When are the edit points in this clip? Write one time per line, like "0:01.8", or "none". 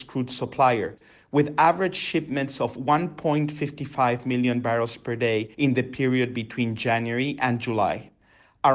0:05.5